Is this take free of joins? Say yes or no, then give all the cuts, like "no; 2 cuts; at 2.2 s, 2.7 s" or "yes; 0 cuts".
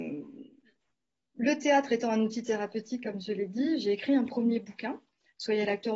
yes; 0 cuts